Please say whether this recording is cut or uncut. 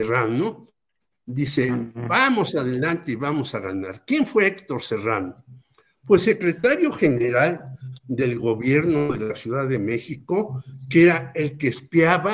uncut